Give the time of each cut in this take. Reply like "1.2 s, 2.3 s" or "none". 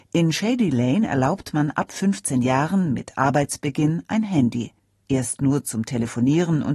none